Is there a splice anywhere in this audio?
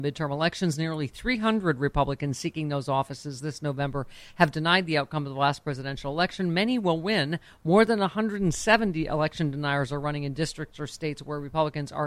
no; 0 cuts

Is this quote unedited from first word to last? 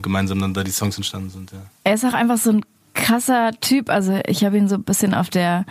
yes; 0 cuts

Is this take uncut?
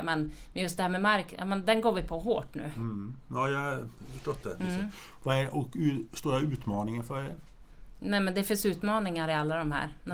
yes; 0 cuts

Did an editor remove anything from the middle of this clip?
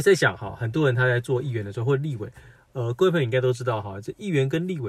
no; 0 cuts

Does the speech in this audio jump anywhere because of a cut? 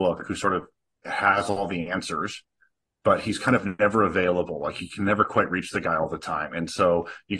no; 0 cuts

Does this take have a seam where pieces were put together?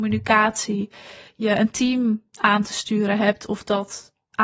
no; 0 cuts

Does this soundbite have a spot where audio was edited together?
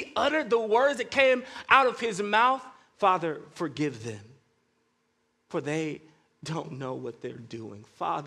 no; 0 cuts

